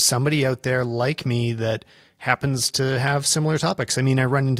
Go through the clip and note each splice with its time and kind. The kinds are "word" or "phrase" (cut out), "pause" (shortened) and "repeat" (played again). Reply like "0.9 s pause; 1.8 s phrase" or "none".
none